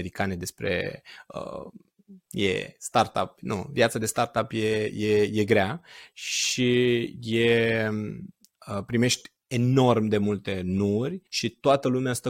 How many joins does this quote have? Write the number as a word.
two